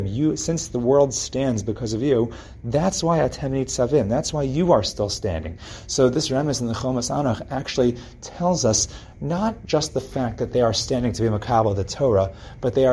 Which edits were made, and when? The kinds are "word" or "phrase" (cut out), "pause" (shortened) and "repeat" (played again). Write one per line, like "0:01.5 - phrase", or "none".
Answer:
none